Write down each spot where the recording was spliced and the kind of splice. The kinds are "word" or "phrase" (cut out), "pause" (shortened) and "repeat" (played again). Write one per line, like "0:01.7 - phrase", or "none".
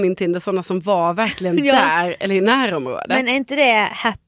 none